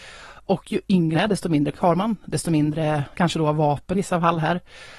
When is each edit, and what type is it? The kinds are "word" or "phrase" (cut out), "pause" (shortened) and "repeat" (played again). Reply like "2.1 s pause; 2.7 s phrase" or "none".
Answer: 1.1 s word; 1.7 s word; 3.1 s word; 3.9 s word